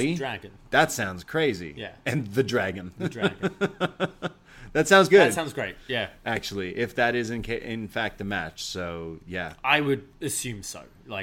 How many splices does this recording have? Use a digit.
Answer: 1